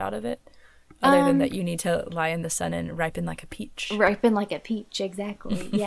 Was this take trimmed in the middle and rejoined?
no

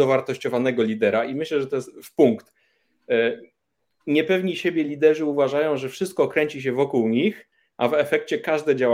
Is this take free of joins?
yes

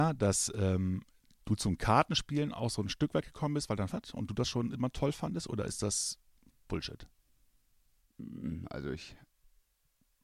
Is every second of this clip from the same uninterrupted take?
no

